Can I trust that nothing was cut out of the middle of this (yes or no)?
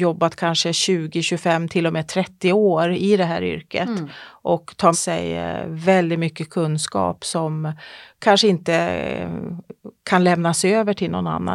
no